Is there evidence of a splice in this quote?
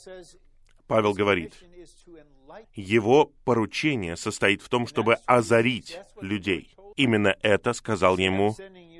yes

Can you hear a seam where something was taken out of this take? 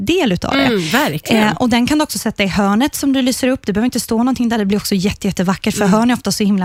no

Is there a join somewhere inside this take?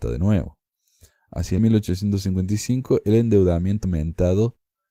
yes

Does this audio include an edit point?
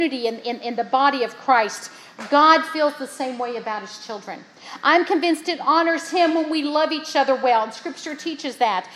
no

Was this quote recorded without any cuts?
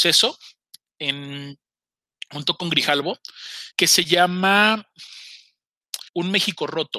no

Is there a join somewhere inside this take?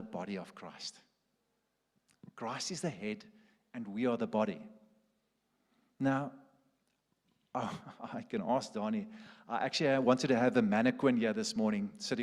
no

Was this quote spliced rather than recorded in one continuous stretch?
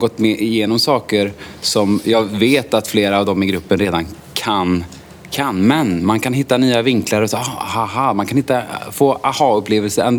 no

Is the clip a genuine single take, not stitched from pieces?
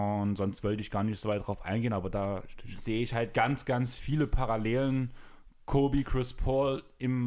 yes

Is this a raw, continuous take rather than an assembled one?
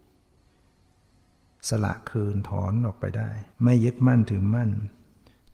no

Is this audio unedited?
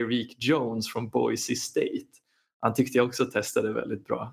yes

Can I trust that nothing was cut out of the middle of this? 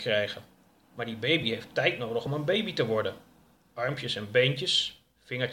yes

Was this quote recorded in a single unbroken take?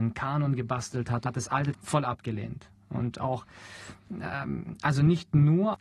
no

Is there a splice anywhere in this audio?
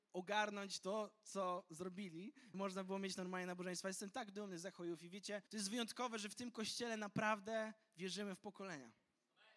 yes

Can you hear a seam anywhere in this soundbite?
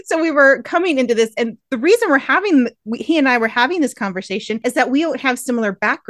no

